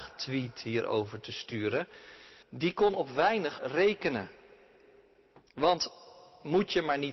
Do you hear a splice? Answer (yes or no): yes